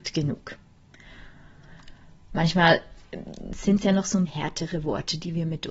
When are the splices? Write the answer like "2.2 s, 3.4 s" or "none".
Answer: 4.3 s